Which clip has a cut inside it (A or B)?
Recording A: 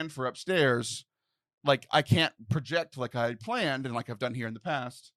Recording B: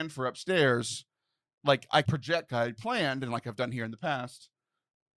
B